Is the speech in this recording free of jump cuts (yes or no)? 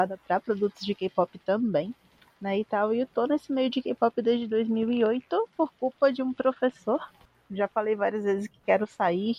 yes